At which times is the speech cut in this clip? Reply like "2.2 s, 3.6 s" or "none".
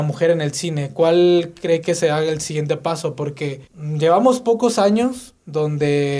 3.7 s